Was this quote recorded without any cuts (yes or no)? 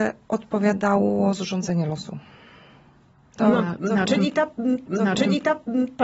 no